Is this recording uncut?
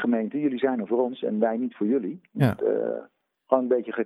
no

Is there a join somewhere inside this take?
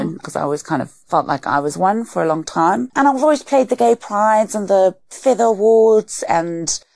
yes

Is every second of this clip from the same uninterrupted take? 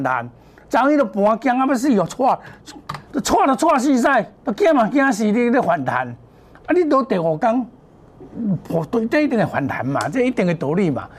no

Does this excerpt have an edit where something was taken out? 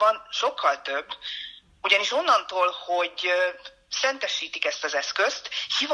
no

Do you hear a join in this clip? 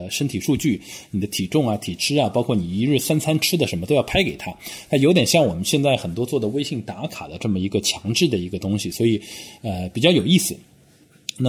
no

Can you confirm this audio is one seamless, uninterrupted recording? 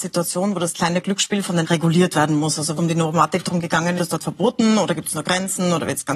no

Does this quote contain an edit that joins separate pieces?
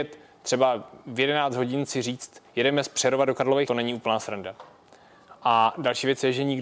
yes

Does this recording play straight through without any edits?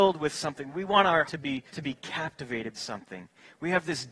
no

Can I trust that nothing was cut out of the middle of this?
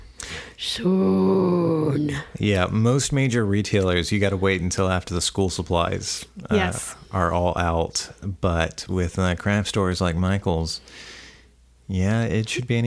yes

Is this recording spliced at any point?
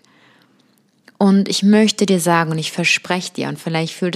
no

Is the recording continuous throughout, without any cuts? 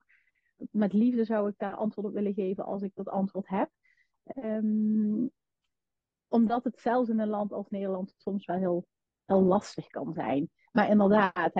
yes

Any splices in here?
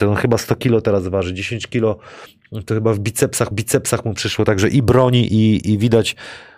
yes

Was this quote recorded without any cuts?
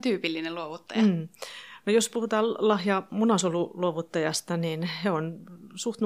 yes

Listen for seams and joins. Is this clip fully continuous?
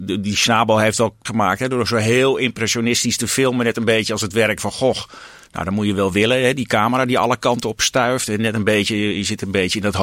no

